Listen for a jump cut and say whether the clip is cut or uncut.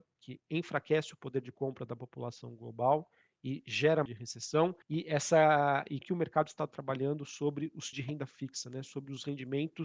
cut